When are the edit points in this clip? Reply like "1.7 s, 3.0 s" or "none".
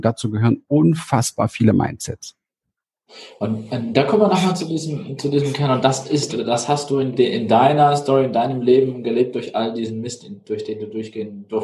6.3 s